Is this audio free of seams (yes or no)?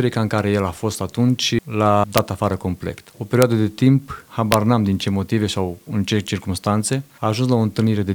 no